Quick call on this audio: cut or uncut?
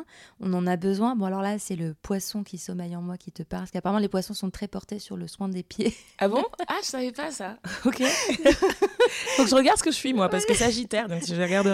uncut